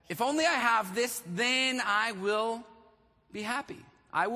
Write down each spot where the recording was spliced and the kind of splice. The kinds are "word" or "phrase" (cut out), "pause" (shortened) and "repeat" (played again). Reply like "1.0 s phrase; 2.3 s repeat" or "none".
none